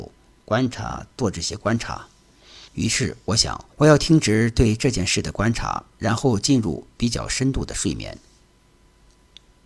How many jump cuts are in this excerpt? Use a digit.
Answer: 2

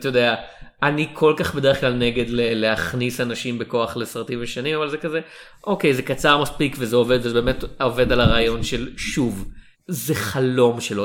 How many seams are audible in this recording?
1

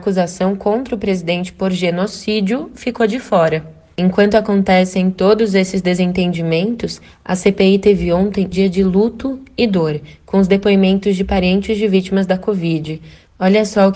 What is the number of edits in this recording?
1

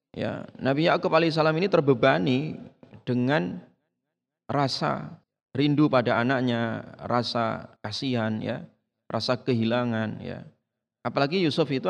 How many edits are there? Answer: 2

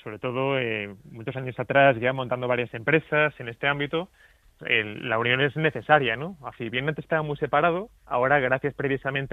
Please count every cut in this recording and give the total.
3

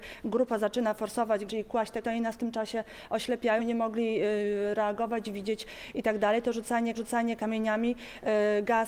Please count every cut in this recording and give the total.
4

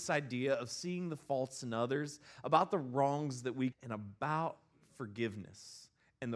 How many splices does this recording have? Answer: 1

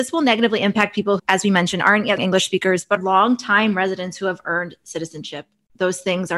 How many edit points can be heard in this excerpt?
3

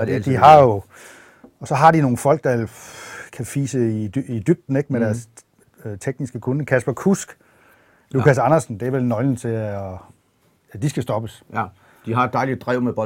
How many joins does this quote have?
0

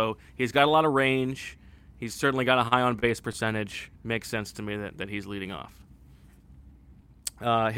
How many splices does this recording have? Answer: 1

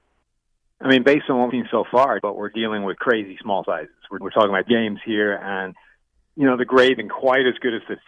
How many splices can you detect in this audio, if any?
6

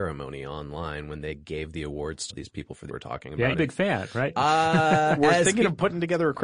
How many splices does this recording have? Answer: 4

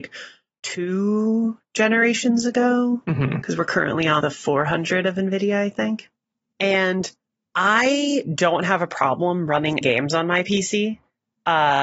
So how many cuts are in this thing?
2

